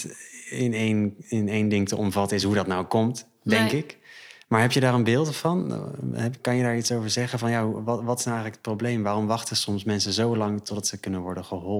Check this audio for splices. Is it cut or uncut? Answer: uncut